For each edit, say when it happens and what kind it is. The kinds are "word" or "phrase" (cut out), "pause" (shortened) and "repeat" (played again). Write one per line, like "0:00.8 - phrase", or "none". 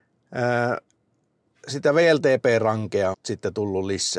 0:03.1 - word